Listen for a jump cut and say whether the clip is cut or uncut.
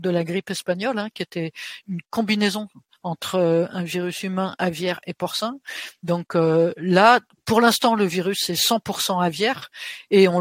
uncut